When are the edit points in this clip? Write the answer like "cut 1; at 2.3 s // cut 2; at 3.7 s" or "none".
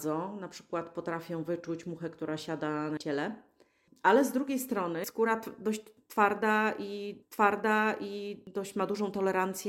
cut 1; at 3.0 s // cut 2; at 5.0 s // cut 3; at 7.2 s